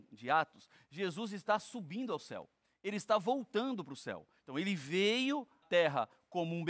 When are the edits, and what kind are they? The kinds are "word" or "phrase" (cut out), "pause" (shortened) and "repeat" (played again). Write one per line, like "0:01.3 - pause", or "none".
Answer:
0:05.6 - word